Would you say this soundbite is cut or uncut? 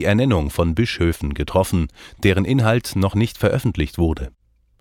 uncut